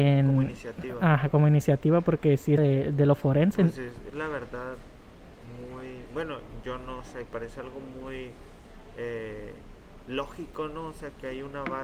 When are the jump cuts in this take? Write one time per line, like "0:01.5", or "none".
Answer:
0:02.6
0:04.1
0:07.3